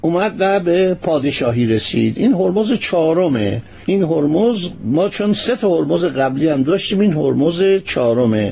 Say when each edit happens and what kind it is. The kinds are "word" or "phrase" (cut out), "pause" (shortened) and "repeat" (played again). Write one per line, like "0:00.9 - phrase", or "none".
none